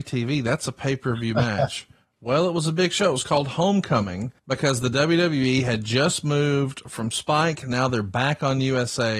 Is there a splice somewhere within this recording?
yes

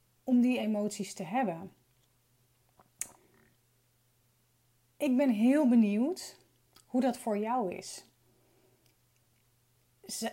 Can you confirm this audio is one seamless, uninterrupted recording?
no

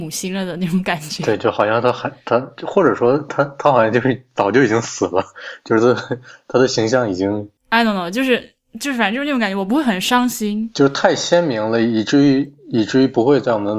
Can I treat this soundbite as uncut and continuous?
no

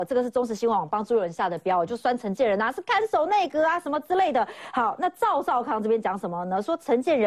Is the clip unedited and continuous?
yes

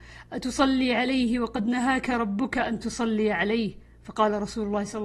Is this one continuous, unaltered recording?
yes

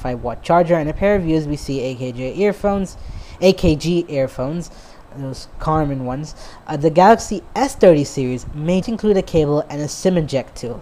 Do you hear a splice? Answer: yes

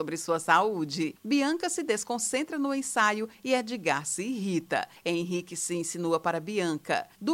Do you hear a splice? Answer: no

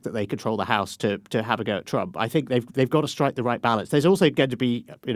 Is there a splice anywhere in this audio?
no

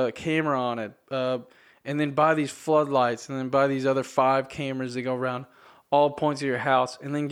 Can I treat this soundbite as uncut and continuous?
yes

